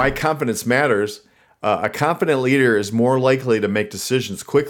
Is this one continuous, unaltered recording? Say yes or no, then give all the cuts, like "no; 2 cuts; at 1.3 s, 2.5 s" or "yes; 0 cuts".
yes; 0 cuts